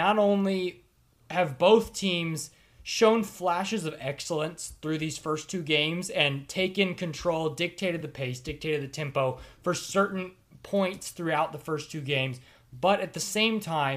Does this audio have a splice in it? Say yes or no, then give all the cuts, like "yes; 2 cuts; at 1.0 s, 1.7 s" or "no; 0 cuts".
no; 0 cuts